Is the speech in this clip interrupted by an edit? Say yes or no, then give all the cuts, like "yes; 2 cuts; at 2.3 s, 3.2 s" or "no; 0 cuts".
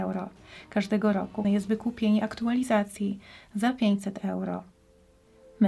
yes; 1 cut; at 1.4 s